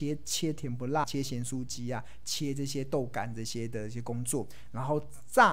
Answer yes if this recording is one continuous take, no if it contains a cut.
no